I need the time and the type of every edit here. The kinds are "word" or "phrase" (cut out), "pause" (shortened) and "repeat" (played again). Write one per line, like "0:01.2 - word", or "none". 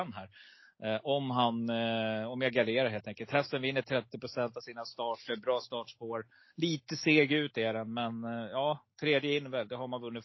none